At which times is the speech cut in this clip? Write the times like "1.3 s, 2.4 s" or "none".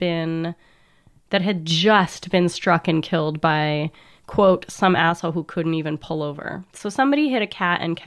none